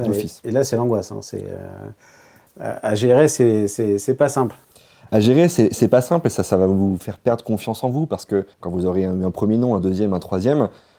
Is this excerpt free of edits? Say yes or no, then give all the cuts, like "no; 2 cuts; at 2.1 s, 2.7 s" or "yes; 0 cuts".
no; 1 cut; at 8.5 s